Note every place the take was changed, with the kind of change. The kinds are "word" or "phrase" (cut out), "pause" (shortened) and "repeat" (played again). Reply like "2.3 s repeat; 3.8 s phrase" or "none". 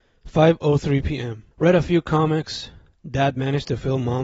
1.5 s pause